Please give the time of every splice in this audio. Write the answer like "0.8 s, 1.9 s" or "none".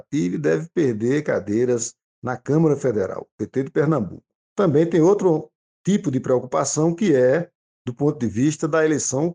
none